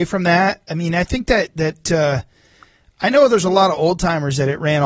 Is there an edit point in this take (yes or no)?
no